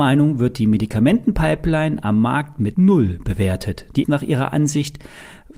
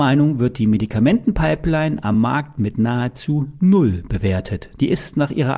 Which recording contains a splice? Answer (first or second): first